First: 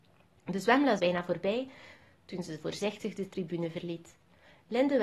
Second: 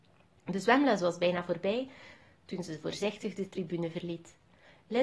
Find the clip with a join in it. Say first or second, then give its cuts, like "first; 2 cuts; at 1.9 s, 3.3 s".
first; 1 cut; at 1.0 s